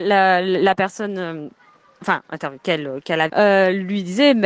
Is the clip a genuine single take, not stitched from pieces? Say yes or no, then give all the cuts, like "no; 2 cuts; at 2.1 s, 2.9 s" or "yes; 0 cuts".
no; 2 cuts; at 2.0 s, 3.3 s